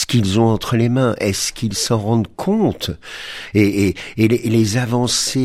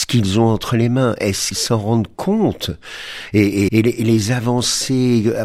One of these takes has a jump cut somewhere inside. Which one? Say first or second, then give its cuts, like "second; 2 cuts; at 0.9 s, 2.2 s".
second; 2 cuts; at 1.5 s, 3.7 s